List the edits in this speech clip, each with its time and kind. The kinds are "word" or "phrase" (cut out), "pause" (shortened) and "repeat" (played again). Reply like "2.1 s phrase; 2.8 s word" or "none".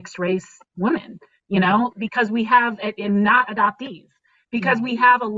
none